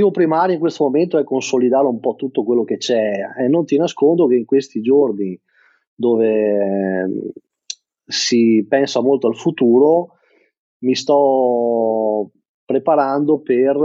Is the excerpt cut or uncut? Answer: uncut